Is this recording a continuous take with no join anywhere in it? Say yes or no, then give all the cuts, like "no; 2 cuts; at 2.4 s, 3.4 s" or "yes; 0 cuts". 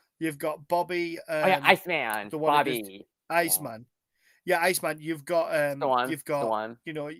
yes; 0 cuts